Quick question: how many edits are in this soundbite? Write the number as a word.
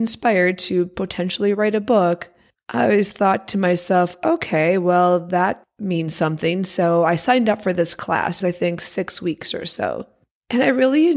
one